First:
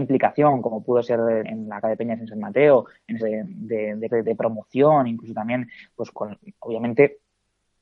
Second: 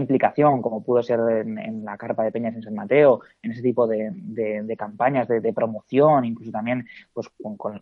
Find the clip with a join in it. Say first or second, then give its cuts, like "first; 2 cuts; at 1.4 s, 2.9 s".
first; 5 cuts; at 1.4 s, 1.8 s, 3.2 s, 4.1 s, 6.1 s